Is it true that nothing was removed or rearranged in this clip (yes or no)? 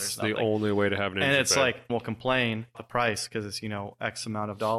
no